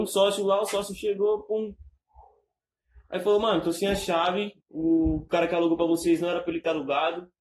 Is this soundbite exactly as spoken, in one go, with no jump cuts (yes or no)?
no